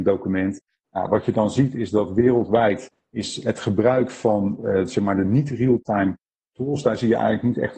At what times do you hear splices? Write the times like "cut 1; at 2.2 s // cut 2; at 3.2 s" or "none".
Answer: none